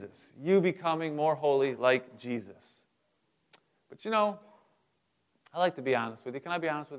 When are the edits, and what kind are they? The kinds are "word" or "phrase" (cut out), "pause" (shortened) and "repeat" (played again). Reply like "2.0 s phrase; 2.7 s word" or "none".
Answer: none

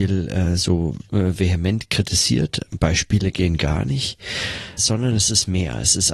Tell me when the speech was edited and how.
4.8 s word

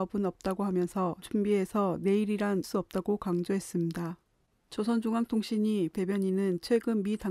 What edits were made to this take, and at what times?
1.2 s word; 2.6 s word; 5.9 s word

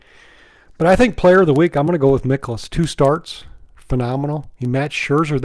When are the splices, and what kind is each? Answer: none

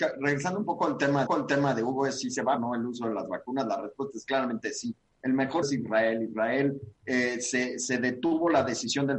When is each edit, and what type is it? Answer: 1.3 s repeat; 2.6 s phrase; 5.6 s word

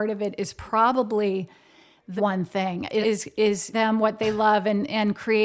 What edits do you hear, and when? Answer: 2.2 s word; 3.0 s word; 3.7 s word

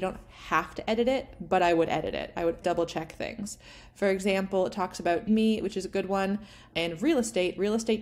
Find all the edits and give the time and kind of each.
2.6 s word; 5.3 s word; 6.7 s word

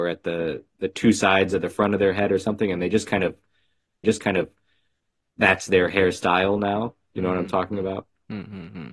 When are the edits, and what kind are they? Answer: 4.0 s repeat

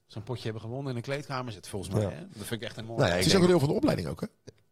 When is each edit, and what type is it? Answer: 1.5 s word; 2.8 s word; 3.5 s word

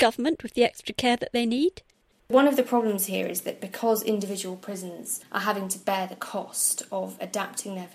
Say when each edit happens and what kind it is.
none

